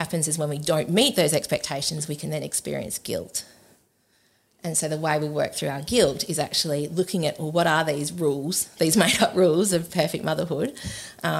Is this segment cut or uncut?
uncut